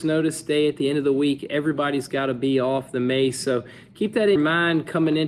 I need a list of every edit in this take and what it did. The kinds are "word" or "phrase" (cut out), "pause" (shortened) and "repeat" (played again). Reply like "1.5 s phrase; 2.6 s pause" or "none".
4.4 s word